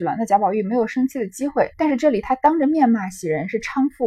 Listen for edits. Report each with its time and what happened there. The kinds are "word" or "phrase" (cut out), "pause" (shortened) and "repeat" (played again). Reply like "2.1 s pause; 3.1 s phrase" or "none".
1.7 s pause